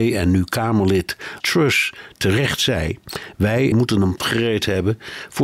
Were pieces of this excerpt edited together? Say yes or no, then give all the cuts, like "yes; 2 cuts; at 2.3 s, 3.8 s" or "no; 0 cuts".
yes; 3 cuts; at 1.4 s, 3.7 s, 4.2 s